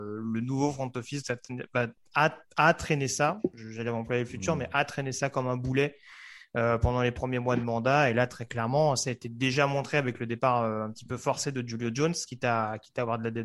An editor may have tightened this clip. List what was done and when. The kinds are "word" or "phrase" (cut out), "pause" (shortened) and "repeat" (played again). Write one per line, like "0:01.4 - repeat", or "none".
none